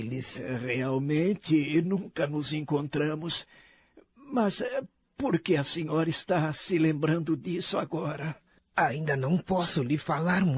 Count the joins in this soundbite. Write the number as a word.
zero